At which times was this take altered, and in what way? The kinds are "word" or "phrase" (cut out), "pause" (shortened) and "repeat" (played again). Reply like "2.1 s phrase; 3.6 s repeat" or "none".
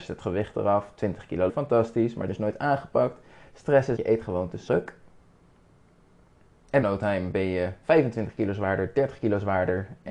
1.5 s word; 2.3 s word; 4.0 s word; 4.7 s word; 6.8 s word